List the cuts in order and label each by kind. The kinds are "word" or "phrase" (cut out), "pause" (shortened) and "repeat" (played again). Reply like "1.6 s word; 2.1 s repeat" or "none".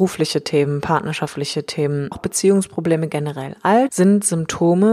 2.1 s word; 3.9 s word